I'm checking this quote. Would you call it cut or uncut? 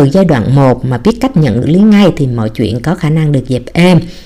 cut